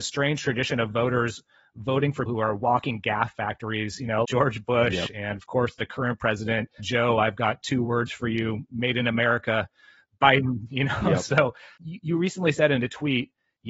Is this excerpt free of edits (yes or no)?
no